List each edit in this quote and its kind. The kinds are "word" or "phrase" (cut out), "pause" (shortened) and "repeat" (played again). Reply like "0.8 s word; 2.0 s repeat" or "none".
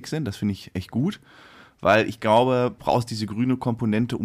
2.8 s word